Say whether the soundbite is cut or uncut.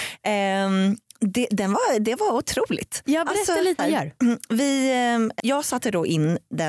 cut